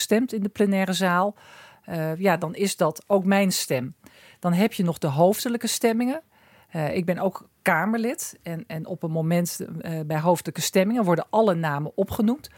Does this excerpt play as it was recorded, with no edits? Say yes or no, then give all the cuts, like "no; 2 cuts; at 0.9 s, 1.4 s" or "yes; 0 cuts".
yes; 0 cuts